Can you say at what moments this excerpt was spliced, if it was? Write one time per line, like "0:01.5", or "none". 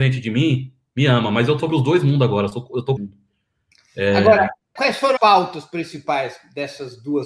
0:01.6
0:03.0
0:04.8
0:05.2

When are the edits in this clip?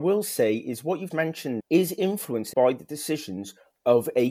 0:01.1
0:01.6
0:02.5

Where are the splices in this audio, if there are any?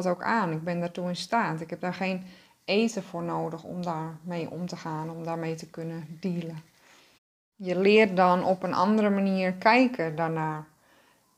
none

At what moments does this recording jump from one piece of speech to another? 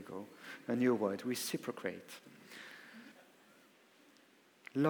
0:03.1

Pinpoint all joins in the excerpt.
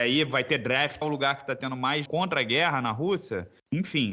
0:01.0
0:02.1

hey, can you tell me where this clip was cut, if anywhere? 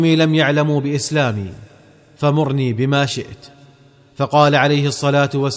none

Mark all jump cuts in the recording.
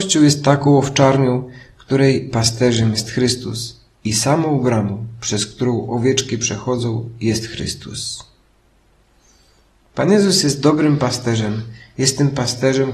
none

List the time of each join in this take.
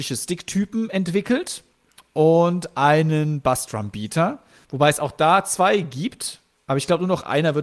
none

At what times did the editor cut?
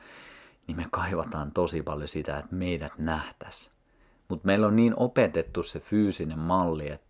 none

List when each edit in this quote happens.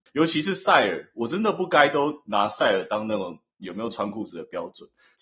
none

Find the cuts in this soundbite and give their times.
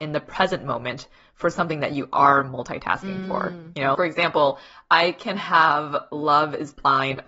0:03.9

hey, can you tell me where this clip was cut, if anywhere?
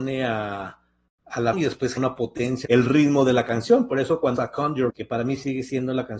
0:01.5
0:02.0
0:02.6
0:04.4
0:04.9

